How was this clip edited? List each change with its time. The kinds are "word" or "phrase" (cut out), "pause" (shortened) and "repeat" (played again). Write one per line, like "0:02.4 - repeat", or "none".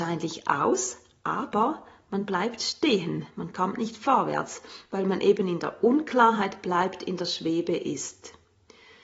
none

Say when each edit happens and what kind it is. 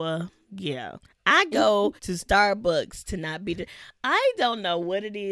0:01.0 - pause
0:02.0 - pause

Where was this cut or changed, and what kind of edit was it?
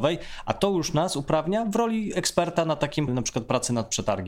0:03.1 - word

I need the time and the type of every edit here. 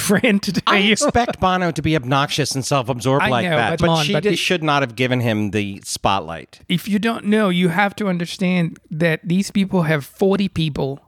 0:03.8 - word

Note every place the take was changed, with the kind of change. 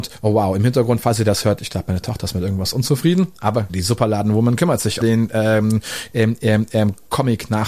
0:03.7 - phrase
0:05.0 - word

